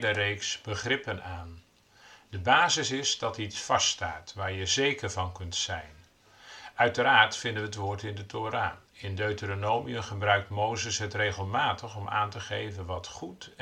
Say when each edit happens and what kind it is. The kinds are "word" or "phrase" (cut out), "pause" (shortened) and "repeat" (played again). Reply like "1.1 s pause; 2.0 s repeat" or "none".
8.9 s pause